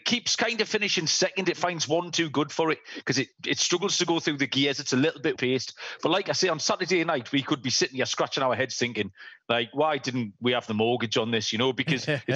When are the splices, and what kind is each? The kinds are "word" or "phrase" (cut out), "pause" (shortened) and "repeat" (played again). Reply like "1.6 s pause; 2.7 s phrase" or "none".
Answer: 5.4 s word